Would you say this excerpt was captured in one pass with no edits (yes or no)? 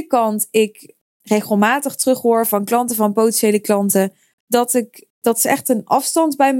yes